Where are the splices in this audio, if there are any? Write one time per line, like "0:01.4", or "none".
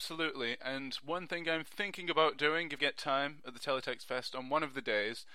0:02.8